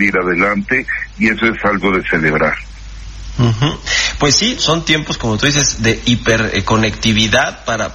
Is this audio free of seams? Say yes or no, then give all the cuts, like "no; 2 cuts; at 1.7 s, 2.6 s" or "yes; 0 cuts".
no; 1 cut; at 4.6 s